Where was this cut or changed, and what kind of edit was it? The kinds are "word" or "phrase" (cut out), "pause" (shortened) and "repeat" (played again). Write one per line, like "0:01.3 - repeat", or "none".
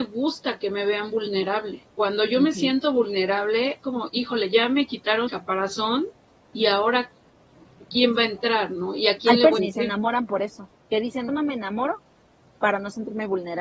0:01.9 - pause
0:03.8 - word
0:05.3 - word
0:09.6 - phrase
0:10.8 - pause
0:11.3 - word